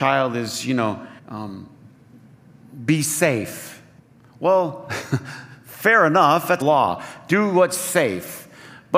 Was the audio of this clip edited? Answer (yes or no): yes